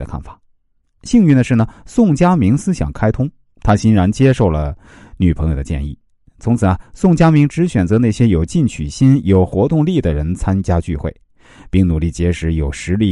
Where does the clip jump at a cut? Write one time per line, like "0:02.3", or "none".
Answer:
none